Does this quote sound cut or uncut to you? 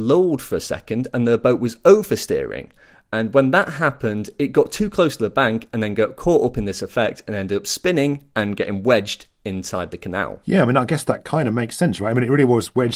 uncut